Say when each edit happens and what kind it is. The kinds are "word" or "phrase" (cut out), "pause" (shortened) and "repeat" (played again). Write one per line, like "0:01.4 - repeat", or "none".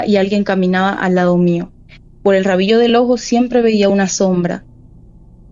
none